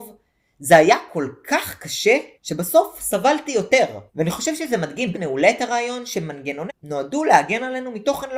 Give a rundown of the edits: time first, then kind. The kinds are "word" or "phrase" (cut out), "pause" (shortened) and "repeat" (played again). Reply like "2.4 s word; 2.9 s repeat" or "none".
2.3 s pause; 4.1 s pause; 5.1 s word; 6.7 s word